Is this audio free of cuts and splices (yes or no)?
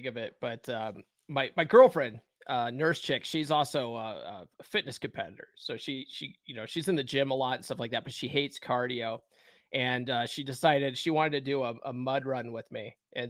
yes